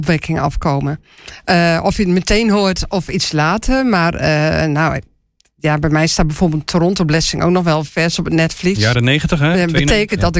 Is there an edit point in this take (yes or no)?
no